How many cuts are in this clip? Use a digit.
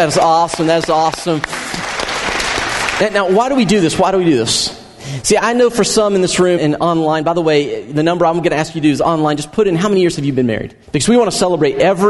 2